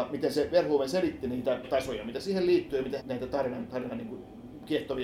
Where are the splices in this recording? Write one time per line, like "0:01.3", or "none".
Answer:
0:01.6
0:03.0